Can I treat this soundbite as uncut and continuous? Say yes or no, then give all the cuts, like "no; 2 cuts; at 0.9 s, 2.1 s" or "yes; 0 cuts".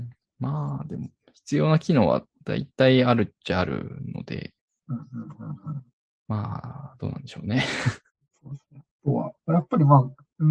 no; 1 cut; at 9.4 s